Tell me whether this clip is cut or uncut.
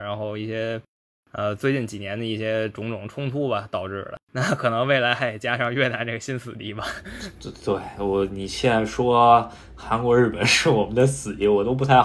cut